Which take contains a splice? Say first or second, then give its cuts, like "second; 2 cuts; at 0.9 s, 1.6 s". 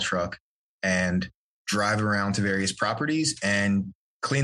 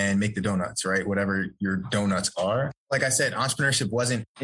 second; 1 cut; at 2.8 s